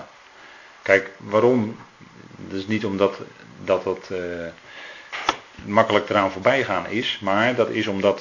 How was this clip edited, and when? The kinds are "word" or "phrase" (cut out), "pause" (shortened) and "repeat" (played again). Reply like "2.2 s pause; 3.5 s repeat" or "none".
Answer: none